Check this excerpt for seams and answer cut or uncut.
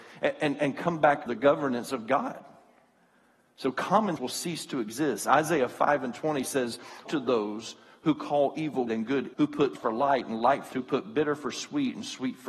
cut